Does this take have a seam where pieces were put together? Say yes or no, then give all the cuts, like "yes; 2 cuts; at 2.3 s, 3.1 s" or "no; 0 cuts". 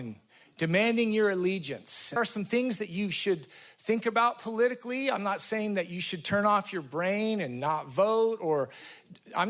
yes; 1 cut; at 2.2 s